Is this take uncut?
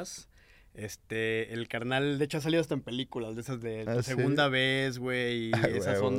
yes; 0 cuts

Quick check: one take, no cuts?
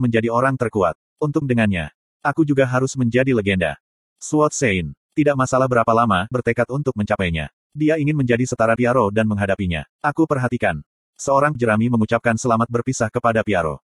no; 6 cuts; at 1.4 s, 5.0 s, 6.3 s, 8.8 s, 9.9 s, 11.6 s

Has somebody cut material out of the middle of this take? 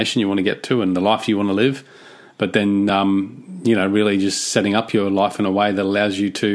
no; 0 cuts

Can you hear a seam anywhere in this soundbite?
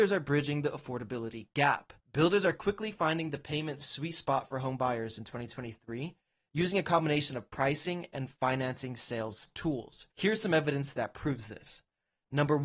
yes; 2 cuts; at 2.0 s, 10.1 s

